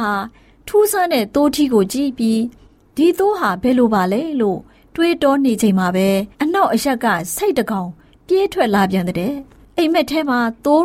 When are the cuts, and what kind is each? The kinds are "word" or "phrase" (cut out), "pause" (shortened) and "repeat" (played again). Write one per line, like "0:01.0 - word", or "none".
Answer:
0:06.3 - pause